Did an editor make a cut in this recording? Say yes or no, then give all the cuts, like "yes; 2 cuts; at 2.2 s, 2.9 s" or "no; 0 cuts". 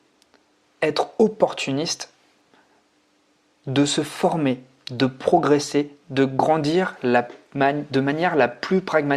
no; 0 cuts